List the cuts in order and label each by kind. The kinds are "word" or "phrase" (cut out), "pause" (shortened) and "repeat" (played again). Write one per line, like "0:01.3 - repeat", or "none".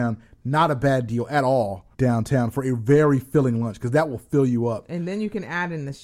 0:01.9 - pause